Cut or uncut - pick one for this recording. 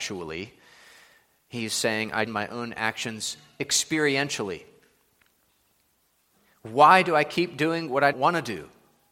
cut